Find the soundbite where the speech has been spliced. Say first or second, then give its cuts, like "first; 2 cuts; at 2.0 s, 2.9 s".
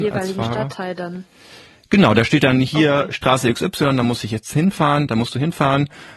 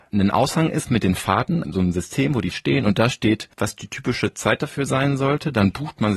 second; 3 cuts; at 1.6 s, 2.5 s, 3.5 s